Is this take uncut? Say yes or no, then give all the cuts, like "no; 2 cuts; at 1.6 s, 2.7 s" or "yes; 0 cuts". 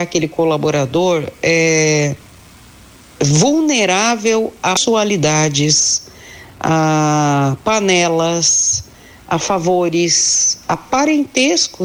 yes; 0 cuts